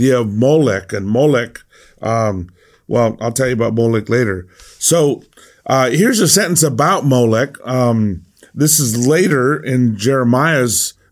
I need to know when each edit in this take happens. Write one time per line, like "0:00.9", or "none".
none